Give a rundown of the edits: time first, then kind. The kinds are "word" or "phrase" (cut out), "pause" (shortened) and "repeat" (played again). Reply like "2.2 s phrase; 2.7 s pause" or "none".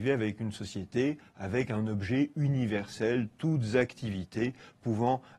none